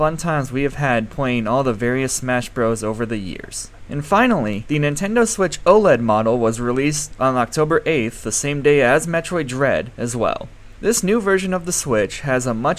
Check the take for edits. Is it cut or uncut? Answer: uncut